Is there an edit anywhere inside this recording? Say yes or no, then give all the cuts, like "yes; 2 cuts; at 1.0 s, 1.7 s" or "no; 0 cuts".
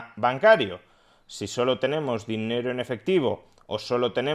no; 0 cuts